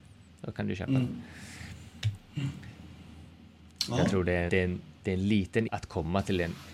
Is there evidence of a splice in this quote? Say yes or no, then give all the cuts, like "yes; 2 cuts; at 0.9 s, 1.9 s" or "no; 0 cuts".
yes; 3 cuts; at 4.5 s, 5.0 s, 5.7 s